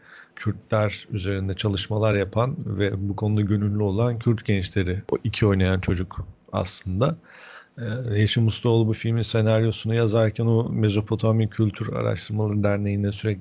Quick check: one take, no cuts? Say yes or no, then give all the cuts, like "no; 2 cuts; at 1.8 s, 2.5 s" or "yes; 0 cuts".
yes; 0 cuts